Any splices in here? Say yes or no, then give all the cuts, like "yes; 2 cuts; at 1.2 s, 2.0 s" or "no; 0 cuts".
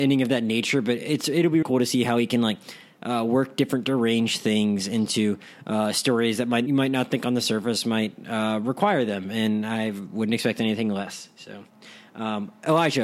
yes; 2 cuts; at 1.6 s, 6.7 s